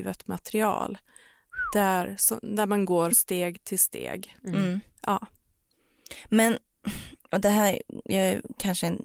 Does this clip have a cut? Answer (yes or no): yes